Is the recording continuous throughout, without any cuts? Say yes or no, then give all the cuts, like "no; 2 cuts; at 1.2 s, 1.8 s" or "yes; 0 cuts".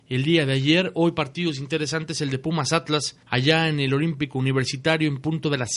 no; 1 cut; at 3.2 s